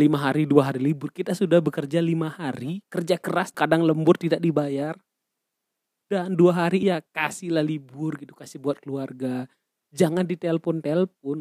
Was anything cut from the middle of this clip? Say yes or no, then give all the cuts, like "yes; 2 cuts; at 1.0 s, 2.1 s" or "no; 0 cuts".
yes; 3 cuts; at 2.8 s, 3.5 s, 6.8 s